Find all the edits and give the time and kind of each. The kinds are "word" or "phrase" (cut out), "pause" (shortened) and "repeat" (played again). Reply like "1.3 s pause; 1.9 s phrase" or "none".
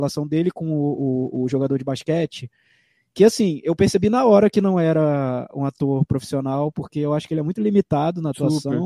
none